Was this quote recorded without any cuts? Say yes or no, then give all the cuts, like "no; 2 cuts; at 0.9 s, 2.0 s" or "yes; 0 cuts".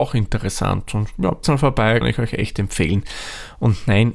no; 2 cuts; at 1.4 s, 2.0 s